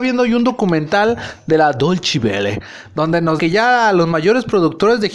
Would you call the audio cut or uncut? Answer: cut